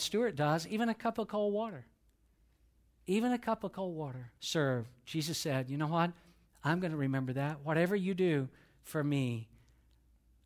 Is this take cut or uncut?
cut